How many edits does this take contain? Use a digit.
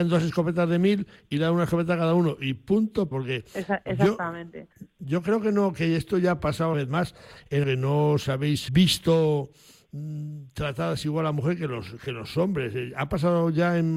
5